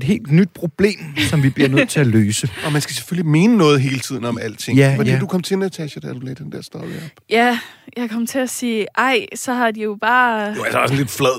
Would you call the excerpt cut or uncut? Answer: uncut